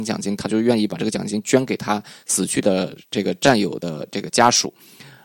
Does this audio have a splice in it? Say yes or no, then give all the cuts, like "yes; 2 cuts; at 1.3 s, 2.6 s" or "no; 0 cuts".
no; 0 cuts